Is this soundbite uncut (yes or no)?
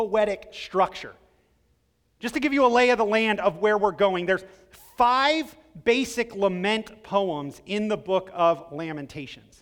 yes